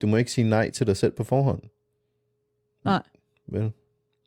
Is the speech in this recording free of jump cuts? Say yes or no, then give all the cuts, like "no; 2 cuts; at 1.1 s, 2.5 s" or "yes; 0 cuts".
yes; 0 cuts